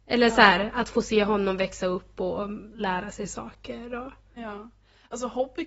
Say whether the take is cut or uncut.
uncut